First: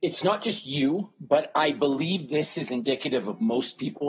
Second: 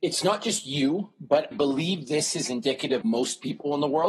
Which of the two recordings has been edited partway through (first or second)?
second